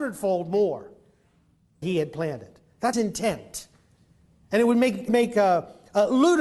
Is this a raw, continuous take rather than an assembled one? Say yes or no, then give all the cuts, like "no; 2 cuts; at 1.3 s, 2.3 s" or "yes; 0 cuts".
no; 3 cuts; at 1.8 s, 2.9 s, 5.1 s